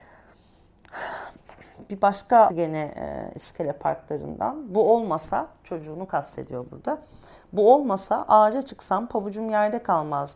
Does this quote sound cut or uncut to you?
cut